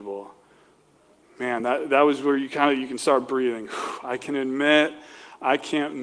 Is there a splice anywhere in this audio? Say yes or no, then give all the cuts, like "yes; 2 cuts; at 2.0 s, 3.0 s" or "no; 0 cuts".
no; 0 cuts